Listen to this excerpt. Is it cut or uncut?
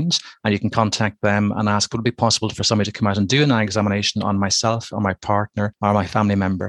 uncut